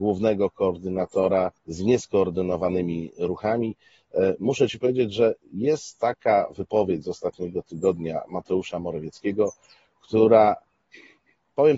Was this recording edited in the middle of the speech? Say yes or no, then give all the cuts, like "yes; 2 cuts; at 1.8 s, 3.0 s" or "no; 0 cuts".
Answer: yes; 1 cut; at 1.6 s